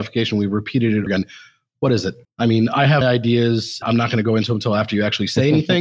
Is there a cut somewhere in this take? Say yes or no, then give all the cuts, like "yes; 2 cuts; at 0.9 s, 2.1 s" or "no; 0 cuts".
yes; 4 cuts; at 1.1 s, 2.2 s, 3.0 s, 3.8 s